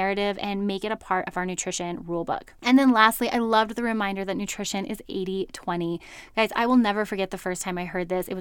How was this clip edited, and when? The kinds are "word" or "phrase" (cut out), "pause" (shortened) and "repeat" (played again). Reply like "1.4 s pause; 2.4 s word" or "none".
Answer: none